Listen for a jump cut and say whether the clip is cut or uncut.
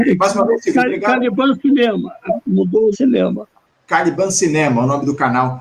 cut